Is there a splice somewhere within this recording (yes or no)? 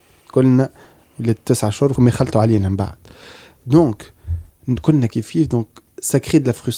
yes